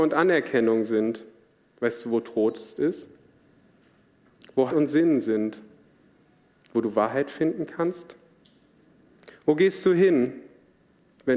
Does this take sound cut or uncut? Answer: cut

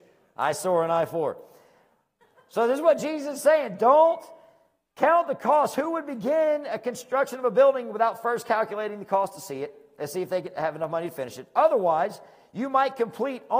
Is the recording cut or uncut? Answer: uncut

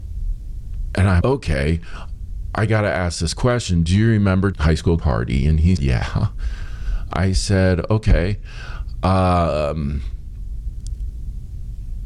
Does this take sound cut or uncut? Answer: cut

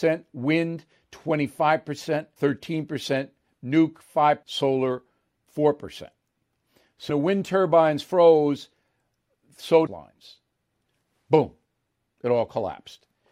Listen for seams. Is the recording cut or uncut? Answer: cut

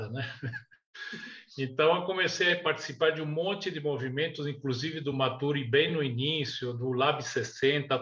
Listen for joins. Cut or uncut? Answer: uncut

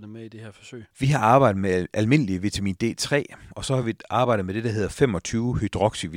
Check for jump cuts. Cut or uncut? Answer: uncut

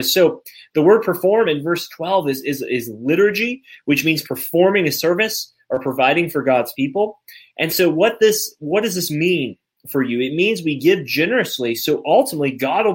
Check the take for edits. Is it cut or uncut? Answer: uncut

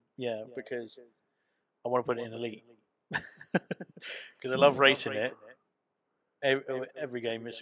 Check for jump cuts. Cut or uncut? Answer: uncut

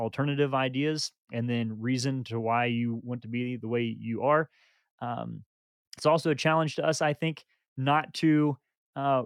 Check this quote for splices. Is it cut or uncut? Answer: uncut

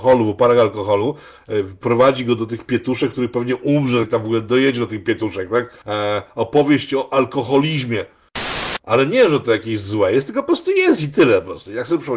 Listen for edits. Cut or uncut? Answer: cut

